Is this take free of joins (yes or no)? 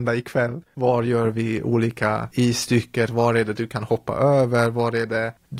no